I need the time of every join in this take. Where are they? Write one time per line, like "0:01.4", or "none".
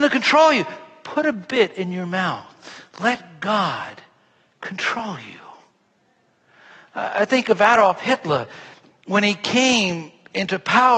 0:02.9

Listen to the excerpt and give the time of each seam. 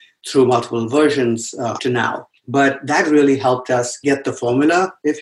0:01.8
0:02.4

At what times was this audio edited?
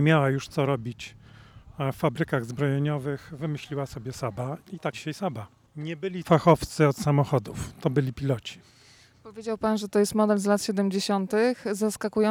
0:04.6
0:04.9
0:06.2

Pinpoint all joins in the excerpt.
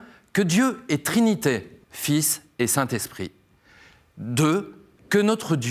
0:01.8

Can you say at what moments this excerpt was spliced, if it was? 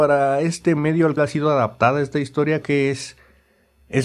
0:01.2
0:02.6

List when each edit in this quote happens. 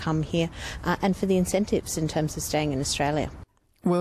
none

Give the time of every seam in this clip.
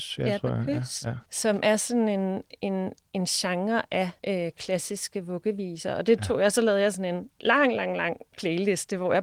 0:01.2
0:04.2

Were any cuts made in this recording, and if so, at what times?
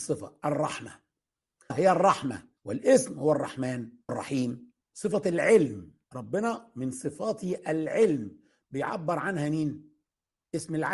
0:01.7
0:02.6
0:04.1
0:04.8
0:06.0

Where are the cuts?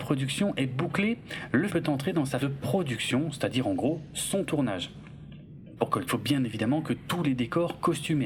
0:01.7
0:02.4
0:06.1

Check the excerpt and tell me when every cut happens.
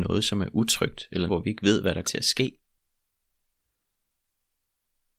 0:01.3
0:02.0

